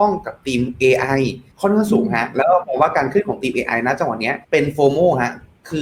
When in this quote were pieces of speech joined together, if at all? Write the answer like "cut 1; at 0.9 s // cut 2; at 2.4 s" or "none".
cut 1; at 1.5 s // cut 2; at 4.4 s